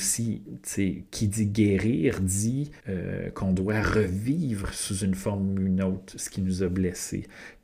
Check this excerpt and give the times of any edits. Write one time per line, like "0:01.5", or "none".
0:02.8

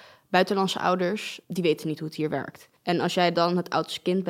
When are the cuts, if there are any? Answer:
0:02.8

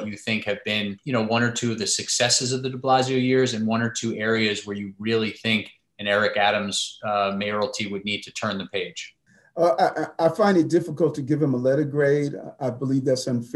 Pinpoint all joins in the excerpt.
none

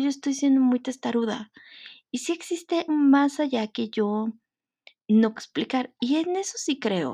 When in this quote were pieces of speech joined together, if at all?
0:02.9
0:05.4

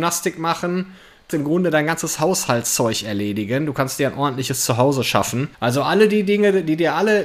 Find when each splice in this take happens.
0:01.3
0:05.5

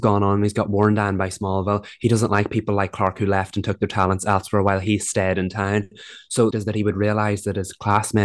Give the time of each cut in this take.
0:06.5

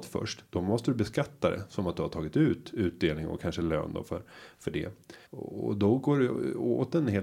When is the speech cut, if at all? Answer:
0:05.3

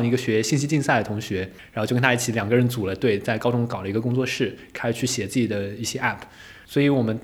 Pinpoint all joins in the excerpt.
none

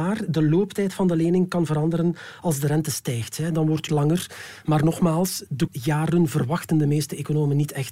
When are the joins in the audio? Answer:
0:03.9
0:05.7

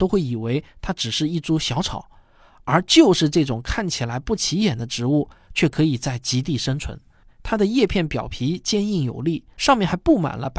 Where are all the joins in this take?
none

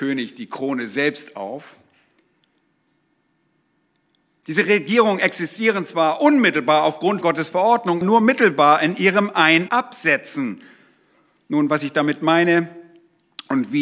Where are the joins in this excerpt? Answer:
0:07.2
0:08.0
0:09.7

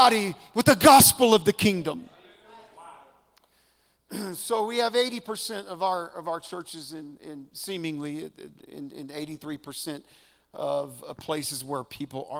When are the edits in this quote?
none

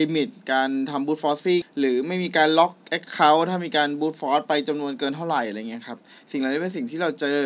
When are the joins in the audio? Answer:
0:01.6

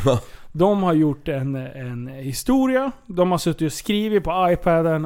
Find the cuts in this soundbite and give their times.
none

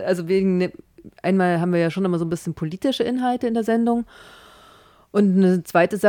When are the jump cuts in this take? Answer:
none

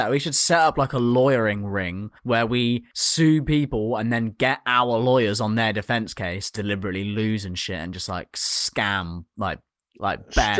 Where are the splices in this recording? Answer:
0:02.2
0:02.9
0:06.6

